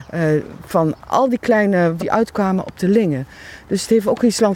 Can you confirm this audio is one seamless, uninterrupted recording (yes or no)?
no